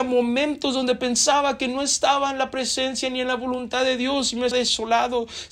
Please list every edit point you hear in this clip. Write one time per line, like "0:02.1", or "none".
0:04.5